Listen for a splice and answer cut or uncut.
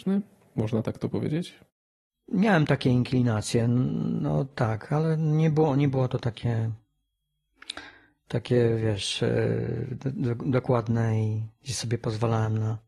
uncut